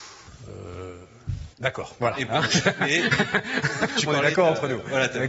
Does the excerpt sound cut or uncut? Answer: cut